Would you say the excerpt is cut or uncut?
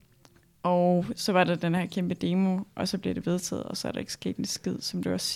uncut